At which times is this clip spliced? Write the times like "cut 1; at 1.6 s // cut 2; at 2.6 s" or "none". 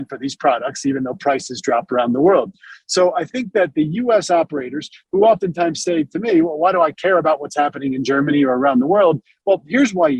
none